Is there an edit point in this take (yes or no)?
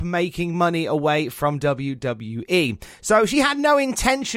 no